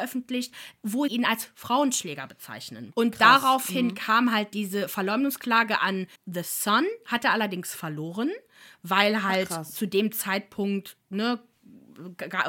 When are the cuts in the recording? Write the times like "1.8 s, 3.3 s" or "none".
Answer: 1.1 s, 6.2 s